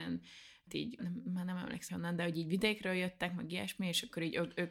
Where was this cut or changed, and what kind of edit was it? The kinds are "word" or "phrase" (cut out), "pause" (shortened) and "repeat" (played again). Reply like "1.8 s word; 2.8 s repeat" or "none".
1.0 s word; 1.9 s word